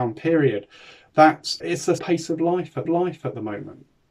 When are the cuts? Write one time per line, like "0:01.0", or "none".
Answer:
0:01.6
0:02.0
0:02.8